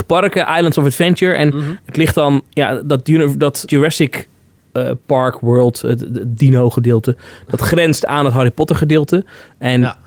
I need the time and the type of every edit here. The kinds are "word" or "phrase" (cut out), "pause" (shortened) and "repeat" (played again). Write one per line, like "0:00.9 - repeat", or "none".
0:03.7 - word

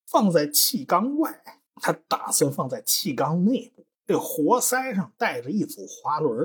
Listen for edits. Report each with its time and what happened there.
0:01.7 - pause
0:03.9 - pause

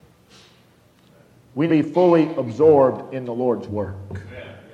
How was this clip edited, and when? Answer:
0:01.7 - phrase

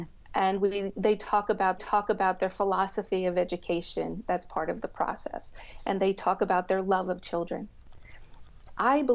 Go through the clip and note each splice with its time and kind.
0:01.8 - repeat

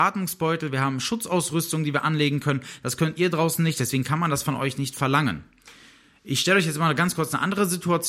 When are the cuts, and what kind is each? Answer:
none

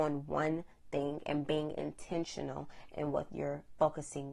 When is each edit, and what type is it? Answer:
none

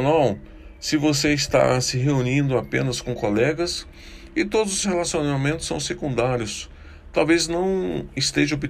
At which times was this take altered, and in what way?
0:04.8 - word

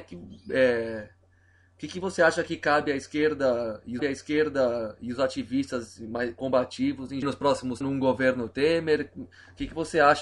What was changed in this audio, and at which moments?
0:04.0 - repeat
0:07.2 - phrase
0:07.8 - phrase

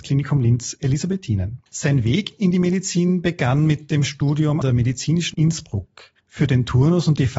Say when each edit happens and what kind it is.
0:01.7 - pause
0:04.6 - word
0:05.3 - word
0:06.2 - pause

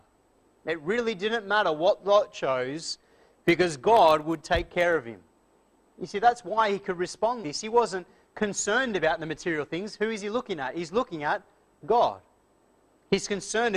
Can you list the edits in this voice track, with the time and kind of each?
0:07.4 - word

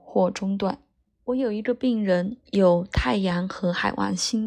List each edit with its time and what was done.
0:01.1 - pause

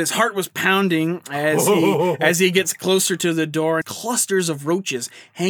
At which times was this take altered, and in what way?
0:03.8 - phrase

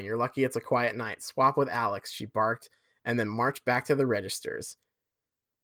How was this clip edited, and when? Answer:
none

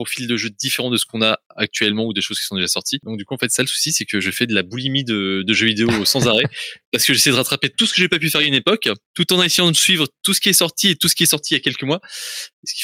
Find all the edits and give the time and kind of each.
none

